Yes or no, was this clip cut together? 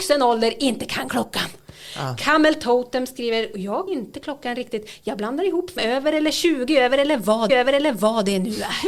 yes